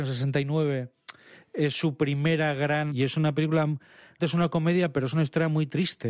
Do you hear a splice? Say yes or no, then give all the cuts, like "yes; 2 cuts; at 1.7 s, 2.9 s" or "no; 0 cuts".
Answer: yes; 2 cuts; at 2.9 s, 4.2 s